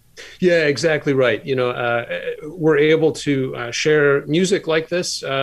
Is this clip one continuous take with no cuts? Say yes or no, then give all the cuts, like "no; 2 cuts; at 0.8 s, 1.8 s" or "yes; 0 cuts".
yes; 0 cuts